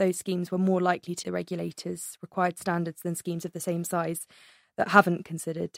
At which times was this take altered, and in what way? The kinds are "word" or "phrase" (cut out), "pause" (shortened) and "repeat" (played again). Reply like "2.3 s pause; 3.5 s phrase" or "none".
1.2 s word